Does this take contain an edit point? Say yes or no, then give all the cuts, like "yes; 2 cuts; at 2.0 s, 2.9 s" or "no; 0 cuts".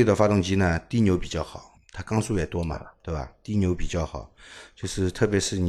yes; 1 cut; at 1.7 s